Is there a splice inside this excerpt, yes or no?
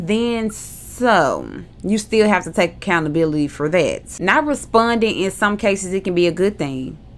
no